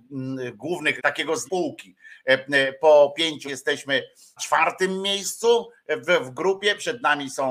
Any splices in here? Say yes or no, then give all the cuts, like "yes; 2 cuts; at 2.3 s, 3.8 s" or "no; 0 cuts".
yes; 4 cuts; at 1.0 s, 1.5 s, 3.4 s, 4.4 s